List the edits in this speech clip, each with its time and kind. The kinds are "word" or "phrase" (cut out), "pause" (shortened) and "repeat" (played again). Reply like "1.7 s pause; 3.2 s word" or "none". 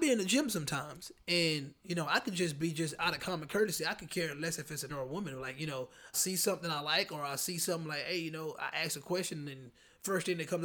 4.9 s word; 6.1 s word